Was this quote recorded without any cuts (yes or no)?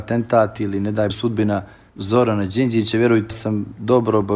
no